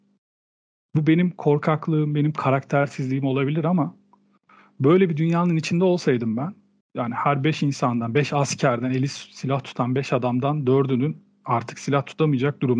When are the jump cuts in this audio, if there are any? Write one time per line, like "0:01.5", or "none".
0:06.8